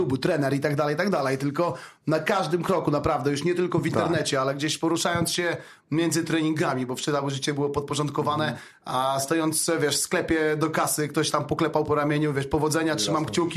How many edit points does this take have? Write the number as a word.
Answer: zero